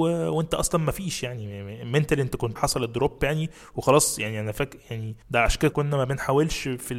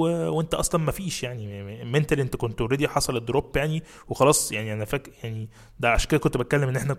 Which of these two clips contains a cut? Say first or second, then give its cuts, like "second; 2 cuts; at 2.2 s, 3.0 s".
first; 3 cuts; at 2.6 s, 5.2 s, 5.7 s